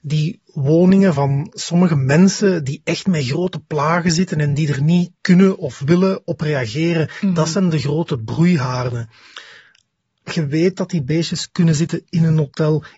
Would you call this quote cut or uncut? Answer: cut